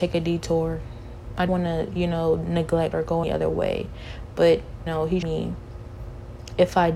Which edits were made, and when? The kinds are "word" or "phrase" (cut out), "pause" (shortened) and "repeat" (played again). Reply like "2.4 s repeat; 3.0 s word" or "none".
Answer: 1.5 s word; 2.9 s word; 3.2 s word; 4.9 s word; 5.2 s word

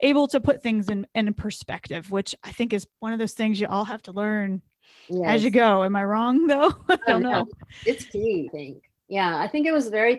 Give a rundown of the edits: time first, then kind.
2.9 s pause; 8.5 s phrase

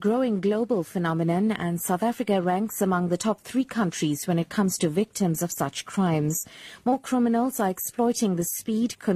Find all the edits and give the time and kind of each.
none

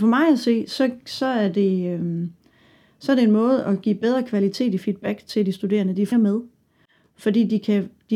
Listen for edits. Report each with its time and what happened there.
6.1 s word

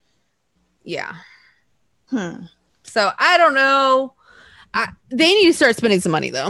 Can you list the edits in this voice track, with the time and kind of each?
none

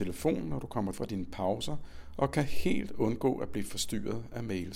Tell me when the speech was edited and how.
0.9 s word

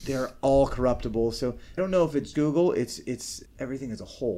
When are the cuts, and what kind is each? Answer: 1.8 s word; 2.3 s word; 3.5 s word

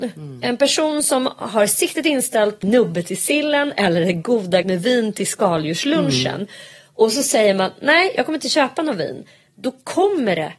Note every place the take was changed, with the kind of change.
2.6 s word; 4.6 s word

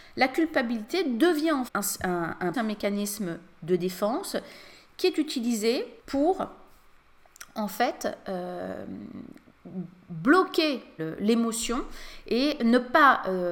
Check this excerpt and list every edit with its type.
1.7 s word; 2.5 s word; 6.0 s pause; 11.0 s word

